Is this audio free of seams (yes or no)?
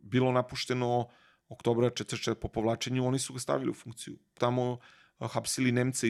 no